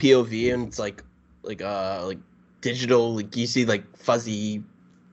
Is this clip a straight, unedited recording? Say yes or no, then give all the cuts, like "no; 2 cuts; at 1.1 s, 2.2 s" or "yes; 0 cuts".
yes; 0 cuts